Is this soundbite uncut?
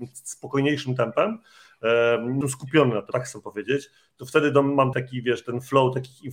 no; 3 cuts; at 2.4 s, 3.1 s, 4.9 s

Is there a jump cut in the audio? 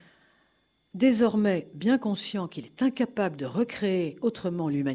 no; 0 cuts

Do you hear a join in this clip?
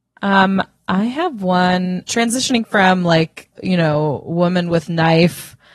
yes; 2 cuts; at 2.0 s, 3.5 s

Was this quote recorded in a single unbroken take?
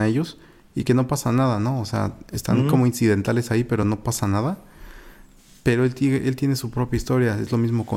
yes; 0 cuts

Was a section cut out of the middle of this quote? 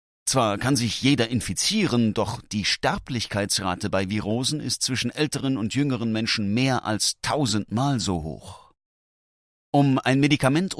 no; 0 cuts

